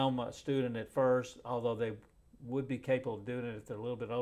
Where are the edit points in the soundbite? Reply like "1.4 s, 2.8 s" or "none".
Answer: none